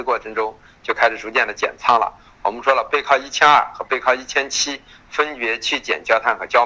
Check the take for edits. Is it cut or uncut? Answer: uncut